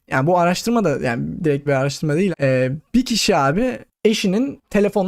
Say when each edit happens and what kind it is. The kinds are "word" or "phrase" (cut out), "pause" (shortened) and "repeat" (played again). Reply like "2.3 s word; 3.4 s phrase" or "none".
1.7 s word; 2.3 s word